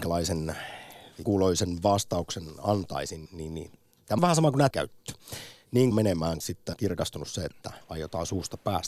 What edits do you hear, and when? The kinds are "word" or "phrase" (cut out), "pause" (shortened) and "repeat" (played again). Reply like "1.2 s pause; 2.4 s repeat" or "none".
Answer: 1.2 s word; 3.3 s word; 4.2 s word; 4.7 s word; 5.9 s word; 6.4 s word; 6.7 s word; 7.8 s word

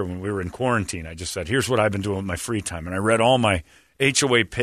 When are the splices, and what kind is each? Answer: none

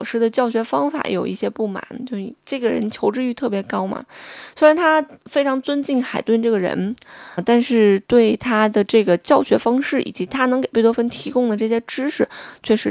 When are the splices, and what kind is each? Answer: 7.4 s word

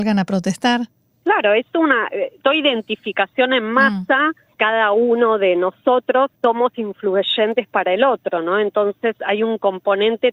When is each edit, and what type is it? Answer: 1.1 s pause; 2.4 s phrase; 4.5 s pause; 6.3 s pause

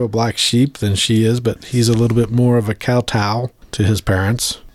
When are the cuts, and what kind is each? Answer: none

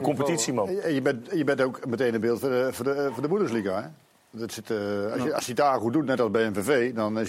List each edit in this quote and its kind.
none

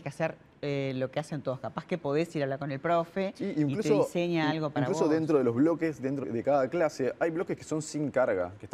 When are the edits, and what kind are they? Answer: 6.2 s word

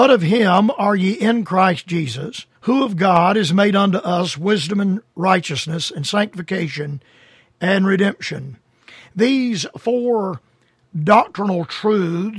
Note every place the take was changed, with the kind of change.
2.6 s pause

